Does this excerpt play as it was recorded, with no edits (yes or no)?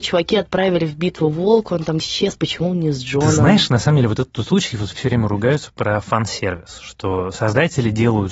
no